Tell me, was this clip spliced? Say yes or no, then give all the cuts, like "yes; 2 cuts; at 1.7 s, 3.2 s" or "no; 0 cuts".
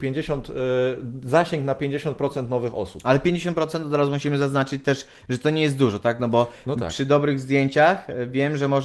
no; 0 cuts